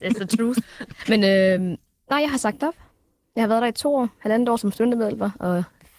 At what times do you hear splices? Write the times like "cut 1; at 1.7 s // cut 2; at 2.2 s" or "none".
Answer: none

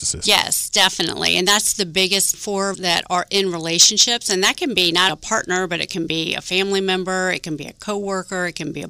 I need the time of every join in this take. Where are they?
cut 1; at 2.3 s // cut 2; at 2.7 s // cut 3; at 5.1 s

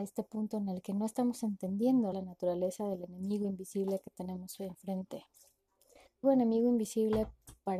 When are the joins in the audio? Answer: cut 1; at 2.1 s // cut 2; at 6.2 s

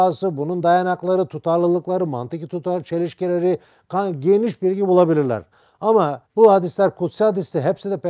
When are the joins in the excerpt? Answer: cut 1; at 6.2 s

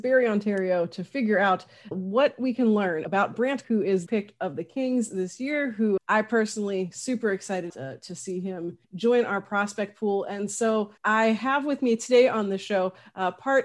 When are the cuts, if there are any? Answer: cut 1; at 1.9 s // cut 2; at 3.6 s // cut 3; at 4.1 s // cut 4; at 6.0 s // cut 5; at 7.7 s // cut 6; at 8.8 s // cut 7; at 11.0 s

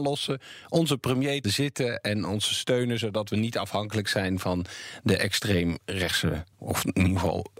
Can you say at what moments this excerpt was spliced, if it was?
cut 1; at 1.4 s // cut 2; at 6.5 s

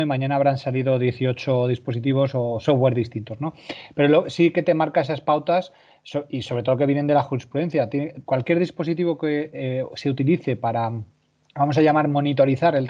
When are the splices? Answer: none

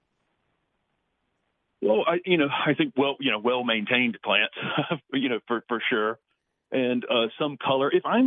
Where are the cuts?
none

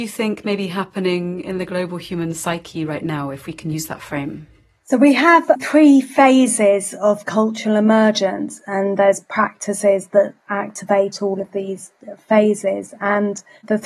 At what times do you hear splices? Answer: none

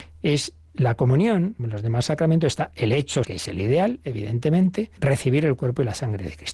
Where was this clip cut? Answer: cut 1; at 1.6 s // cut 2; at 3.2 s // cut 3; at 5.0 s

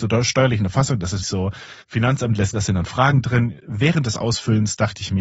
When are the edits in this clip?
cut 1; at 1.2 s // cut 2; at 1.8 s // cut 3; at 2.5 s

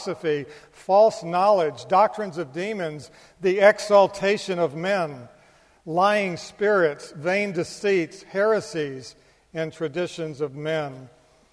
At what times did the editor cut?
none

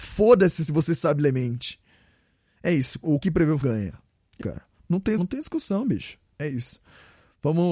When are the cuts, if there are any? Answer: cut 1; at 3.2 s // cut 2; at 3.6 s // cut 3; at 4.4 s // cut 4; at 5.2 s

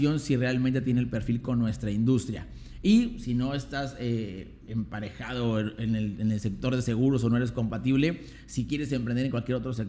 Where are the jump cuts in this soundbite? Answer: none

